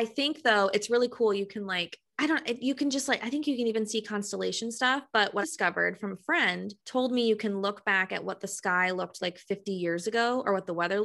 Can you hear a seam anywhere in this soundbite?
yes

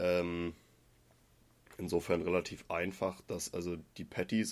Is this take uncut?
yes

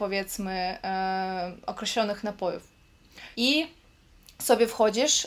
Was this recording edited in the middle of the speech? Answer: yes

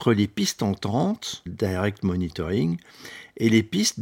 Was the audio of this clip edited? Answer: yes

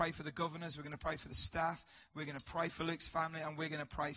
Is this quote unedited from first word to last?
yes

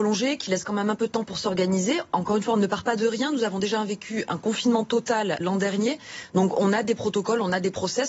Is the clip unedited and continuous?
no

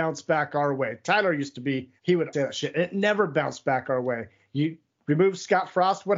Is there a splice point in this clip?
yes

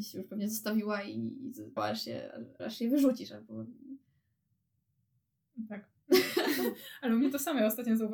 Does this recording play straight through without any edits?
no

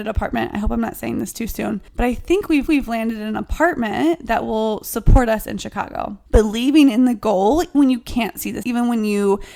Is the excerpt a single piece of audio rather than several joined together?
no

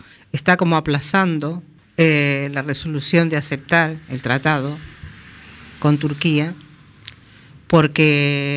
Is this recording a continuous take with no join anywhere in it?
no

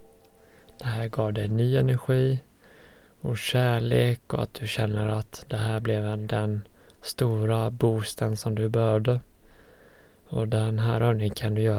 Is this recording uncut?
yes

